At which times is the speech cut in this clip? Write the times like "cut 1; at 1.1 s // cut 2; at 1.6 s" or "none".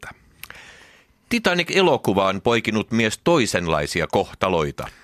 none

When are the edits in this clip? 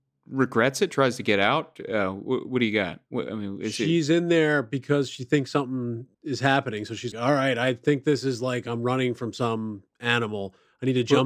cut 1; at 6.1 s // cut 2; at 7.1 s // cut 3; at 9.9 s

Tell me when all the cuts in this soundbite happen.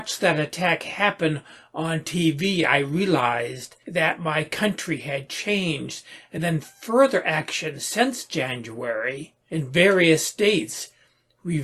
none

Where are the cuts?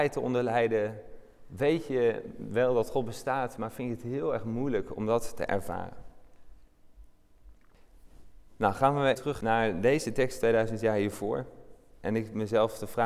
cut 1; at 9.1 s

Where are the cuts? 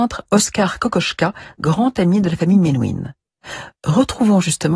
none

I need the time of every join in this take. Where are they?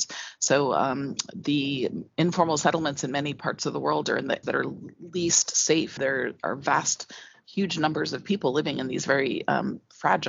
cut 1; at 4.4 s // cut 2; at 6.0 s

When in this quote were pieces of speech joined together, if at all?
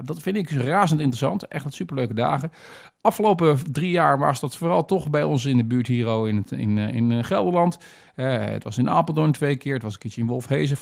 none

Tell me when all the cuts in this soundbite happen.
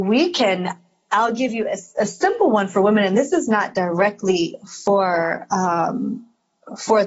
none

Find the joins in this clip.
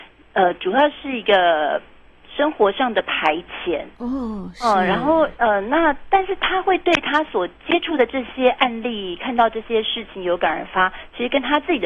cut 1; at 3.9 s

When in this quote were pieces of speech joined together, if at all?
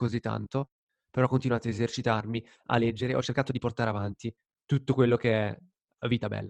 none

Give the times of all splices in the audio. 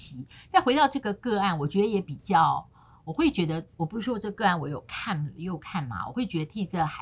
none

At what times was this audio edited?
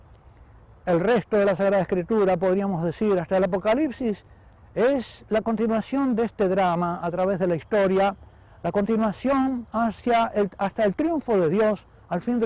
none

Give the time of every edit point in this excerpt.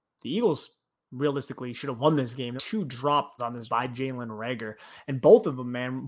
cut 1; at 2.6 s // cut 2; at 3.4 s // cut 3; at 3.7 s

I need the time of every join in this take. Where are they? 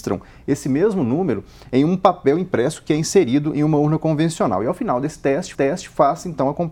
cut 1; at 5.5 s

